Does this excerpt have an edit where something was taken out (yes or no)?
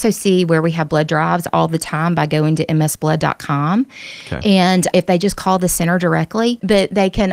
yes